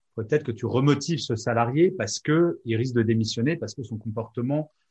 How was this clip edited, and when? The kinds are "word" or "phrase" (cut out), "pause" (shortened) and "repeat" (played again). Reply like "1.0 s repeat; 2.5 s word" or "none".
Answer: none

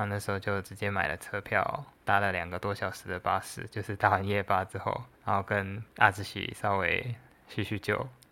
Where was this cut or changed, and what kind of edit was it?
1.9 s pause; 5.1 s pause

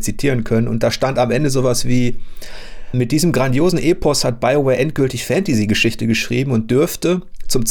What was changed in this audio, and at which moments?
2.9 s word

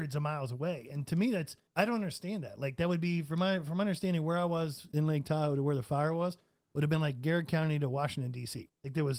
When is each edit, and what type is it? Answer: 1.7 s pause

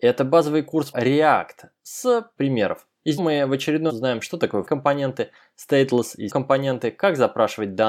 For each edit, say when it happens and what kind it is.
0.9 s word; 2.4 s phrase; 3.2 s word; 3.9 s word; 4.7 s word; 6.3 s word

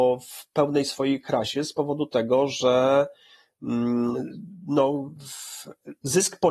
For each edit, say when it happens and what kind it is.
none

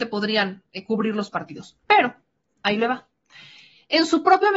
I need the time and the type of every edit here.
1.8 s pause

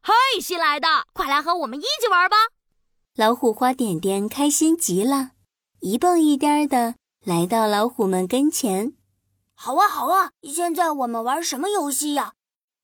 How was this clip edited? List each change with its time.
1.1 s pause; 2.6 s pause; 10.3 s pause

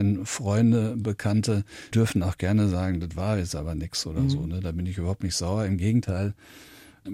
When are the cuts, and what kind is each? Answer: 1.9 s word

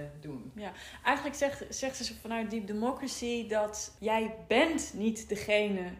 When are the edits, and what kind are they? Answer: 4.0 s word

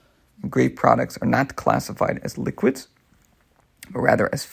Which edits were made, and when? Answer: none

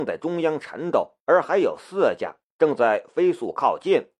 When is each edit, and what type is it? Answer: 1.2 s pause

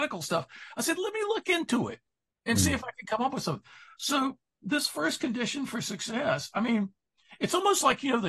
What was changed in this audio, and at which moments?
none

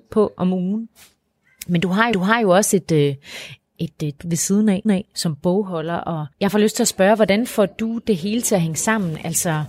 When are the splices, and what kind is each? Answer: 2.1 s repeat; 4.2 s word; 4.8 s repeat; 6.3 s pause

